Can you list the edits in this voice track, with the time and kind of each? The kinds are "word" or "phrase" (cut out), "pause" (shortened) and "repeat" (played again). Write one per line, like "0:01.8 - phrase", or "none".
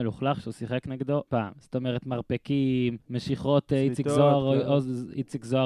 0:01.3 - word
0:03.0 - pause